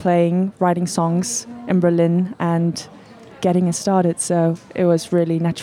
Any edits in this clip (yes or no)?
no